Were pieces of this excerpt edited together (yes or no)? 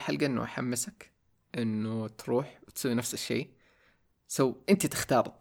no